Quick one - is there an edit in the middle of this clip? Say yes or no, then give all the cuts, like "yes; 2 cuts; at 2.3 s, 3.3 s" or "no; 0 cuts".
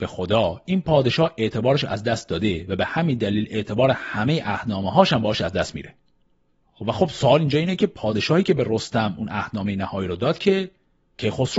no; 0 cuts